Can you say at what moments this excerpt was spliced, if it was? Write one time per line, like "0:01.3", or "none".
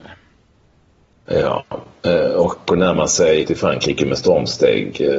0:02.7
0:03.4